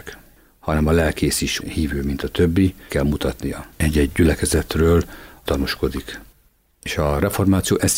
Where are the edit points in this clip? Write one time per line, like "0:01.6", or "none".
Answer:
0:01.6
0:02.9
0:03.7
0:05.5